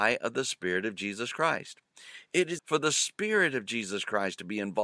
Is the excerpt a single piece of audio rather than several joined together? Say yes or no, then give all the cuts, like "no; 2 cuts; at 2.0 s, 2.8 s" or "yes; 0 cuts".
no; 1 cut; at 2.6 s